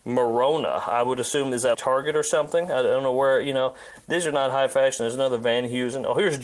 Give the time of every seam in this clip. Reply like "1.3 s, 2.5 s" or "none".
1.7 s